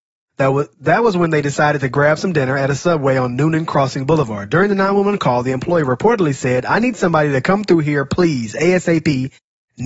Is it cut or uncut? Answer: uncut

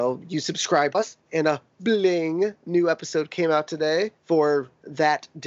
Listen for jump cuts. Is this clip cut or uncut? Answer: cut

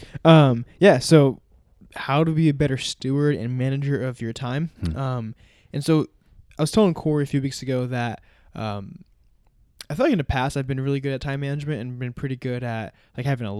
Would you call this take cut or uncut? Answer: uncut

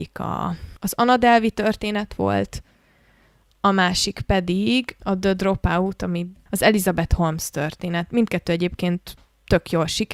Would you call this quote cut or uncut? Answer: uncut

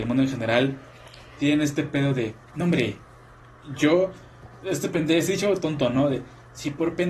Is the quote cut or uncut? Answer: cut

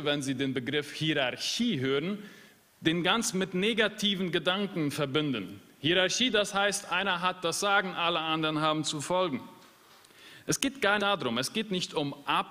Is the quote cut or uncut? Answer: cut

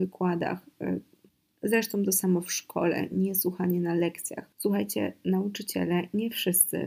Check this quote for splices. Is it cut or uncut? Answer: cut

